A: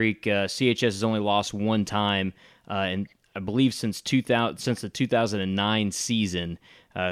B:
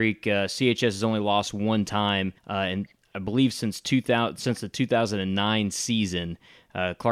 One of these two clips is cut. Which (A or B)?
B